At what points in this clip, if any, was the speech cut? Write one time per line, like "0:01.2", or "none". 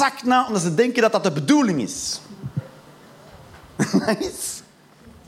none